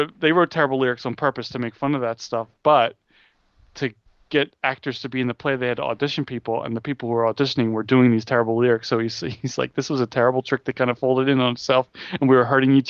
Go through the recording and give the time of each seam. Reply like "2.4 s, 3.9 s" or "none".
none

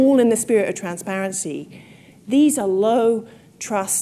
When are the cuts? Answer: none

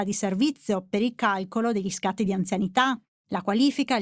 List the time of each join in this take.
none

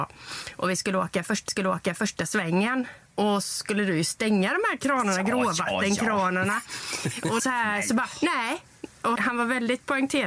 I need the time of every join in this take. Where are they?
1.5 s, 3.4 s, 7.4 s, 9.1 s

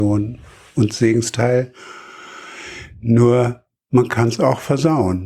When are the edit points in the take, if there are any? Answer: none

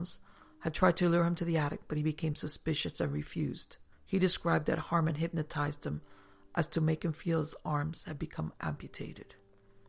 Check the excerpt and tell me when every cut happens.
3.9 s

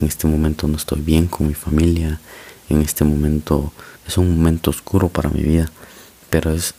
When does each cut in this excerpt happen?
4.0 s

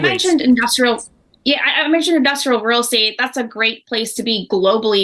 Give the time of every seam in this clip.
none

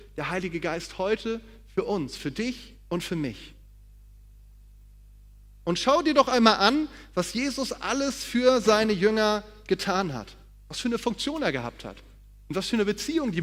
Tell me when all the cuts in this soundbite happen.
none

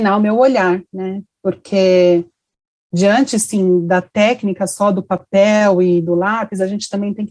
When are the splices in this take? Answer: none

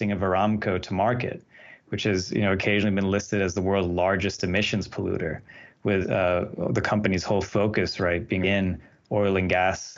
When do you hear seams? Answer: 6.0 s, 8.4 s

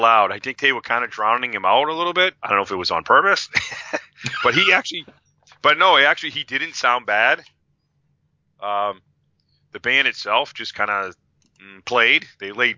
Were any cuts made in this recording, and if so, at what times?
2.4 s

